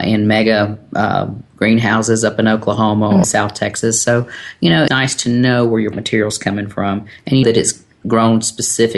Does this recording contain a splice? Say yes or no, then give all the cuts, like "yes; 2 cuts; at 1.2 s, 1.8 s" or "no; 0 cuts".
yes; 4 cuts; at 3.2 s, 4.9 s, 5.9 s, 7.4 s